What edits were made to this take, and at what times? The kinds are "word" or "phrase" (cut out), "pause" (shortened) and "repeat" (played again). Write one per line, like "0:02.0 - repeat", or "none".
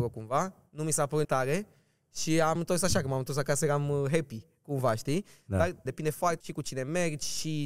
0:01.2 - word
0:02.6 - word
0:05.9 - word
0:06.4 - word